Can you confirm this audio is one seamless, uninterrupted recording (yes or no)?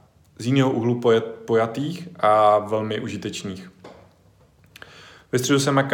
yes